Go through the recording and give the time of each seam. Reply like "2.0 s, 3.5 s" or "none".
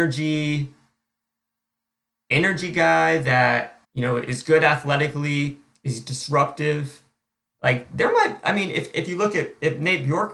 3.8 s